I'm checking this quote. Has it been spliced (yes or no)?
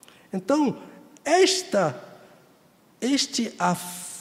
no